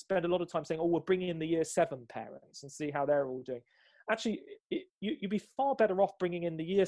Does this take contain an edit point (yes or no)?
no